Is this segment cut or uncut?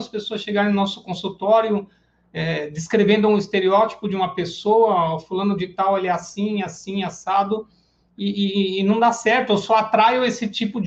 uncut